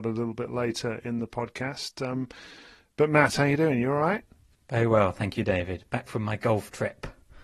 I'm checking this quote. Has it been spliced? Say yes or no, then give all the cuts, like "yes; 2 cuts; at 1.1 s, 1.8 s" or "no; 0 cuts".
no; 0 cuts